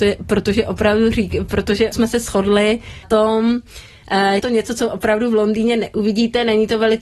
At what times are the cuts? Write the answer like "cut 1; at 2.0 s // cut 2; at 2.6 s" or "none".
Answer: cut 1; at 1.9 s // cut 2; at 3.0 s // cut 3; at 4.4 s